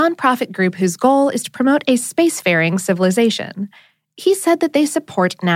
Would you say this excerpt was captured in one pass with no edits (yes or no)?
yes